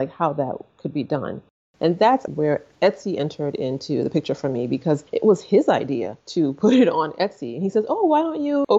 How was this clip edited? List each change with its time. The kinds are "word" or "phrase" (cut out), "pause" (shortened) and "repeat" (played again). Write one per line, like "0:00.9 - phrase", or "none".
0:02.3 - word